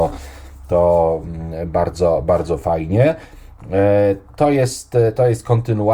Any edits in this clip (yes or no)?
no